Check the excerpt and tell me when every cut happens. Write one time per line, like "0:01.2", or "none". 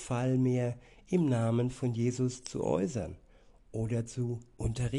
none